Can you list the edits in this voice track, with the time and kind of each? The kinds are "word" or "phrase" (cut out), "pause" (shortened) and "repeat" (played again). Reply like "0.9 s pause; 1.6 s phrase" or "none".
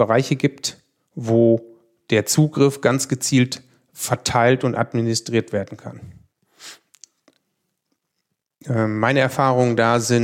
none